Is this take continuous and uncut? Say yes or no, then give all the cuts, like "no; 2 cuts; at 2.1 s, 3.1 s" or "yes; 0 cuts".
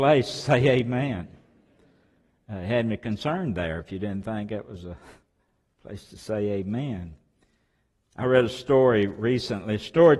yes; 0 cuts